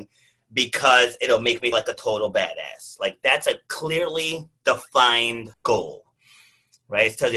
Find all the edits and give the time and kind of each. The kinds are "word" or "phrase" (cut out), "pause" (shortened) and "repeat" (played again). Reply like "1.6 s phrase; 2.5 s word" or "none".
1.7 s word; 5.5 s pause